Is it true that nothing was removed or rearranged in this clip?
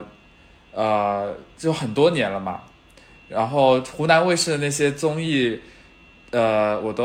yes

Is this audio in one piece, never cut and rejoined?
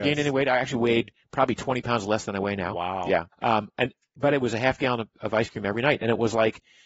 no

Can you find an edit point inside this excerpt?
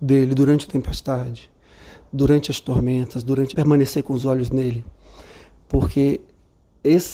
yes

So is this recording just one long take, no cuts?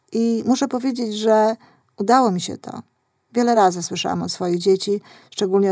yes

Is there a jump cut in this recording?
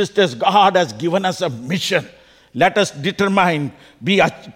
no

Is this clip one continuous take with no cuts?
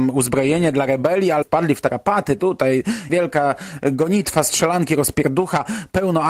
no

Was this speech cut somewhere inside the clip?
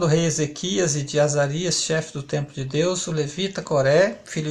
no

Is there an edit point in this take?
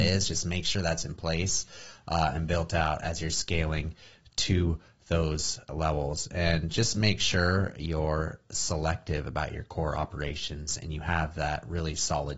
no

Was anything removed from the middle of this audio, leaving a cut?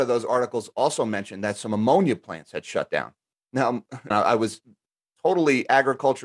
yes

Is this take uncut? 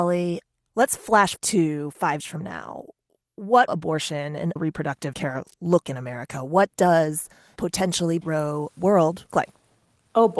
no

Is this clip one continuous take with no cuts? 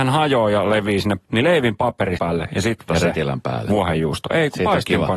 no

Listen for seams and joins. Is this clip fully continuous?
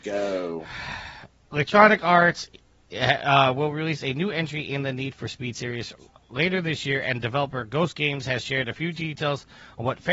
no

